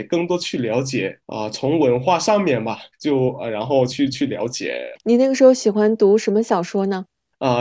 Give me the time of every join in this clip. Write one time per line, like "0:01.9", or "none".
0:01.2
0:02.9